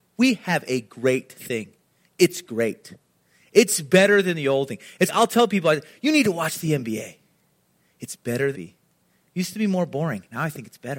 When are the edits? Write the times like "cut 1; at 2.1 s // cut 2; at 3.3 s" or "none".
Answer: cut 1; at 5.1 s // cut 2; at 8.5 s